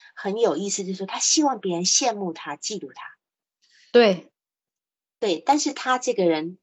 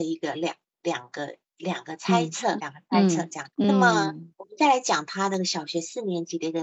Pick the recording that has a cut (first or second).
second